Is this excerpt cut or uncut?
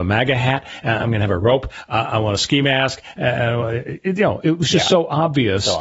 uncut